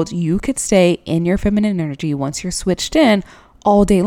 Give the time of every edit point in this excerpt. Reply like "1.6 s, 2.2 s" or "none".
none